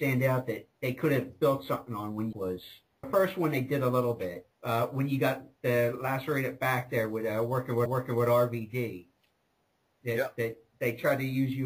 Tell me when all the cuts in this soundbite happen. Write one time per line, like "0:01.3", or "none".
0:02.3
0:03.0
0:04.5
0:07.9